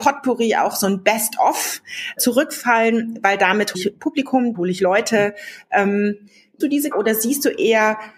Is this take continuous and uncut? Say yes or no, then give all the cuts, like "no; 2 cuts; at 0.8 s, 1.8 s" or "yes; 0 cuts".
no; 5 cuts; at 2.2 s, 3.7 s, 4.5 s, 6.6 s, 6.9 s